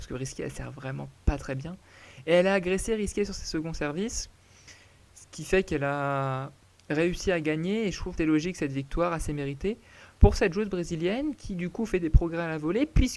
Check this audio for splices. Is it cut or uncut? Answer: cut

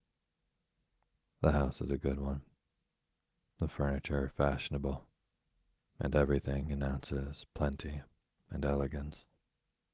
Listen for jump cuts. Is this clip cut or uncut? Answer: uncut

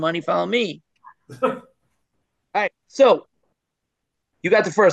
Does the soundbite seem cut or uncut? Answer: uncut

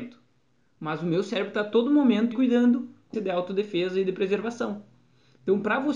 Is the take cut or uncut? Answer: cut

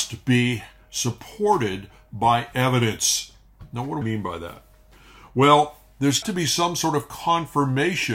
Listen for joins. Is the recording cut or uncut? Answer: cut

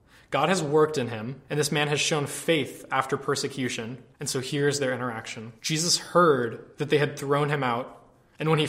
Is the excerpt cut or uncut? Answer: cut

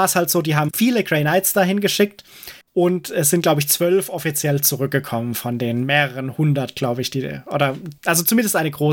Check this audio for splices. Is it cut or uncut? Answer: cut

